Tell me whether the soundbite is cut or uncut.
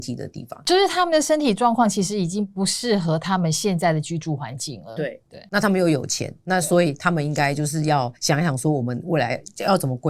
cut